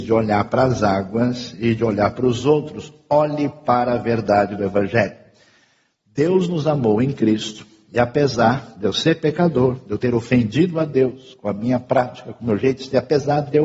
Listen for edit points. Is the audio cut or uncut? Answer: uncut